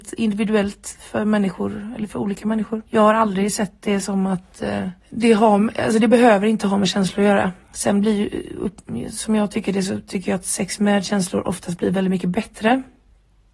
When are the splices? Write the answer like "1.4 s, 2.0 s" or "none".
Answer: 2.9 s, 5.0 s, 7.6 s